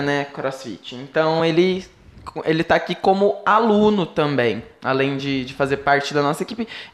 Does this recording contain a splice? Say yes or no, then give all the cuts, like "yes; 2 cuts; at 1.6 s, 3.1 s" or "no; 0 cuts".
no; 0 cuts